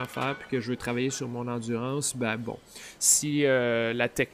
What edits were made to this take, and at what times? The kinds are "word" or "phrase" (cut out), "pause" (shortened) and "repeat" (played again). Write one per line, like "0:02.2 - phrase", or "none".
none